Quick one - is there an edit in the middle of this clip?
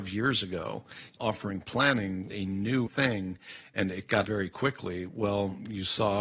yes; 4 cuts; at 1.2 s, 2.3 s, 2.9 s, 4.2 s

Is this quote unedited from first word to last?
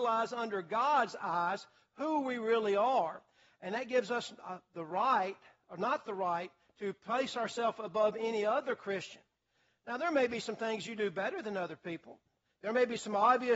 yes; 0 cuts

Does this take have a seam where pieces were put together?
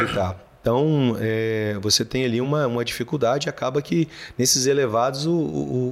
no; 0 cuts

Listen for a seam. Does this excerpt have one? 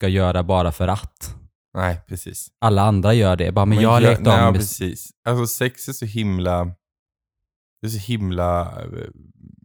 no; 0 cuts

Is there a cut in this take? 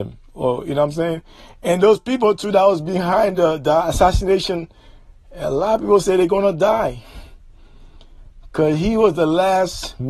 no; 0 cuts

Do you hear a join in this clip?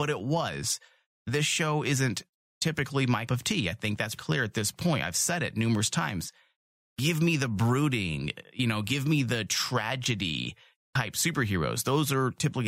yes; 2 cuts; at 3.3 s, 4.2 s

